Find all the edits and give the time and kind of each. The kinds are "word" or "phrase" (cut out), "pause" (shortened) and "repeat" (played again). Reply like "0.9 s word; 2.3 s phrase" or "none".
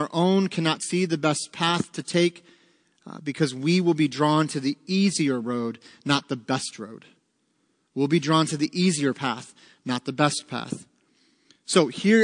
none